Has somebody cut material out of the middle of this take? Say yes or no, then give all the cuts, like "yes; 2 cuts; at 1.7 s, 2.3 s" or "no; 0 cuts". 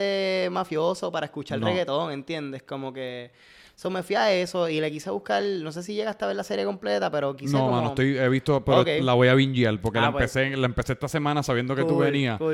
no; 0 cuts